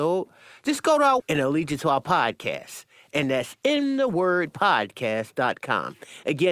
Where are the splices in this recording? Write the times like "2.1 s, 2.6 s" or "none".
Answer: 1.2 s